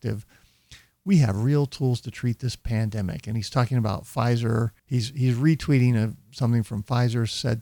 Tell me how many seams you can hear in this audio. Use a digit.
1